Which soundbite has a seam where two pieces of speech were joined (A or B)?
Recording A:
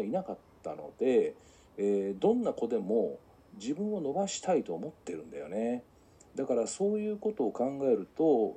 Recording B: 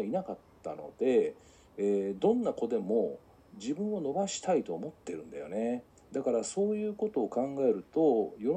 B